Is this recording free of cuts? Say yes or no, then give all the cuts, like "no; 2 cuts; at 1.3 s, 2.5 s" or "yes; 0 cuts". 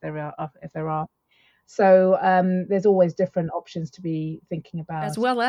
yes; 0 cuts